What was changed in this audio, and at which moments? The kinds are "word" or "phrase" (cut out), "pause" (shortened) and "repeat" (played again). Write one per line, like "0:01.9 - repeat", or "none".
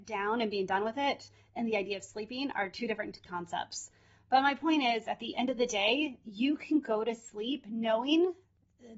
none